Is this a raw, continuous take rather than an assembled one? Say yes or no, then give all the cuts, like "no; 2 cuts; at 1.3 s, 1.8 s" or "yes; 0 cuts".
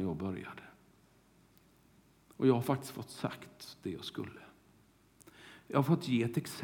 yes; 0 cuts